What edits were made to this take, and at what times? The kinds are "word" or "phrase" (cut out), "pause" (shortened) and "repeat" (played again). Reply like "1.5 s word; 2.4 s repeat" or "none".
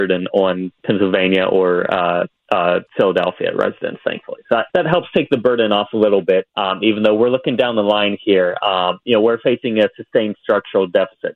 2.9 s pause; 4.7 s pause; 6.5 s pause

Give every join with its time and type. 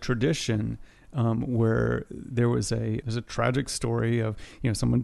3.0 s word

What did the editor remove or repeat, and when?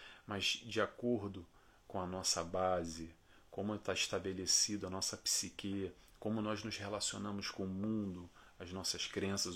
none

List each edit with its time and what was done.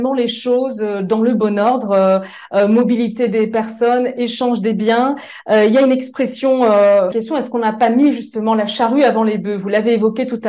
7.1 s phrase

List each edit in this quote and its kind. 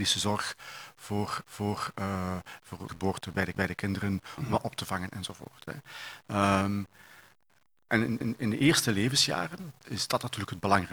1.4 s repeat; 2.9 s phrase; 3.5 s repeat; 8.2 s repeat; 9.8 s phrase

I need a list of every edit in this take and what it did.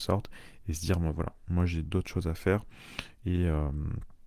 1.8 s word

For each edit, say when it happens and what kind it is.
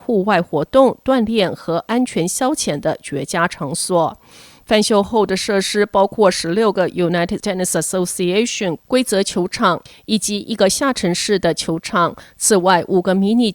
7.4 s word

